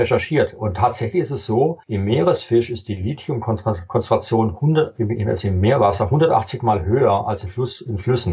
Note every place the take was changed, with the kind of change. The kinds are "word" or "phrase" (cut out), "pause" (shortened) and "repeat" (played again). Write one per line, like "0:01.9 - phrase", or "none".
0:01.8 - pause